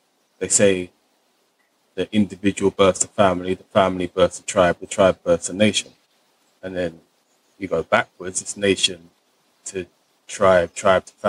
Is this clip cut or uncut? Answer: uncut